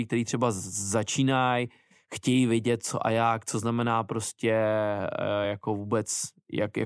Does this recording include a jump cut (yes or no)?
no